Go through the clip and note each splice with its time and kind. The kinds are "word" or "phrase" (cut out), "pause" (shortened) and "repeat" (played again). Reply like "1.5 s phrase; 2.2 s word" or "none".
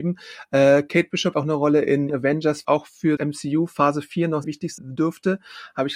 1.3 s word; 2.1 s word; 2.6 s word; 3.2 s word; 4.4 s word; 4.8 s word